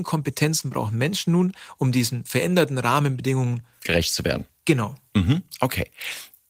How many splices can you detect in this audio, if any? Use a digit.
0